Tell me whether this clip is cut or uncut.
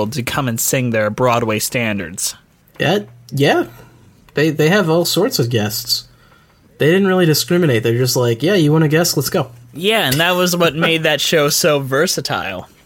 uncut